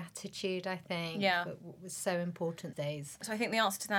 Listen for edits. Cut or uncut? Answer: cut